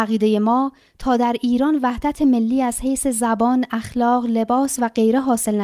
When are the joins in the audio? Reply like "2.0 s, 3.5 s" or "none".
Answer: none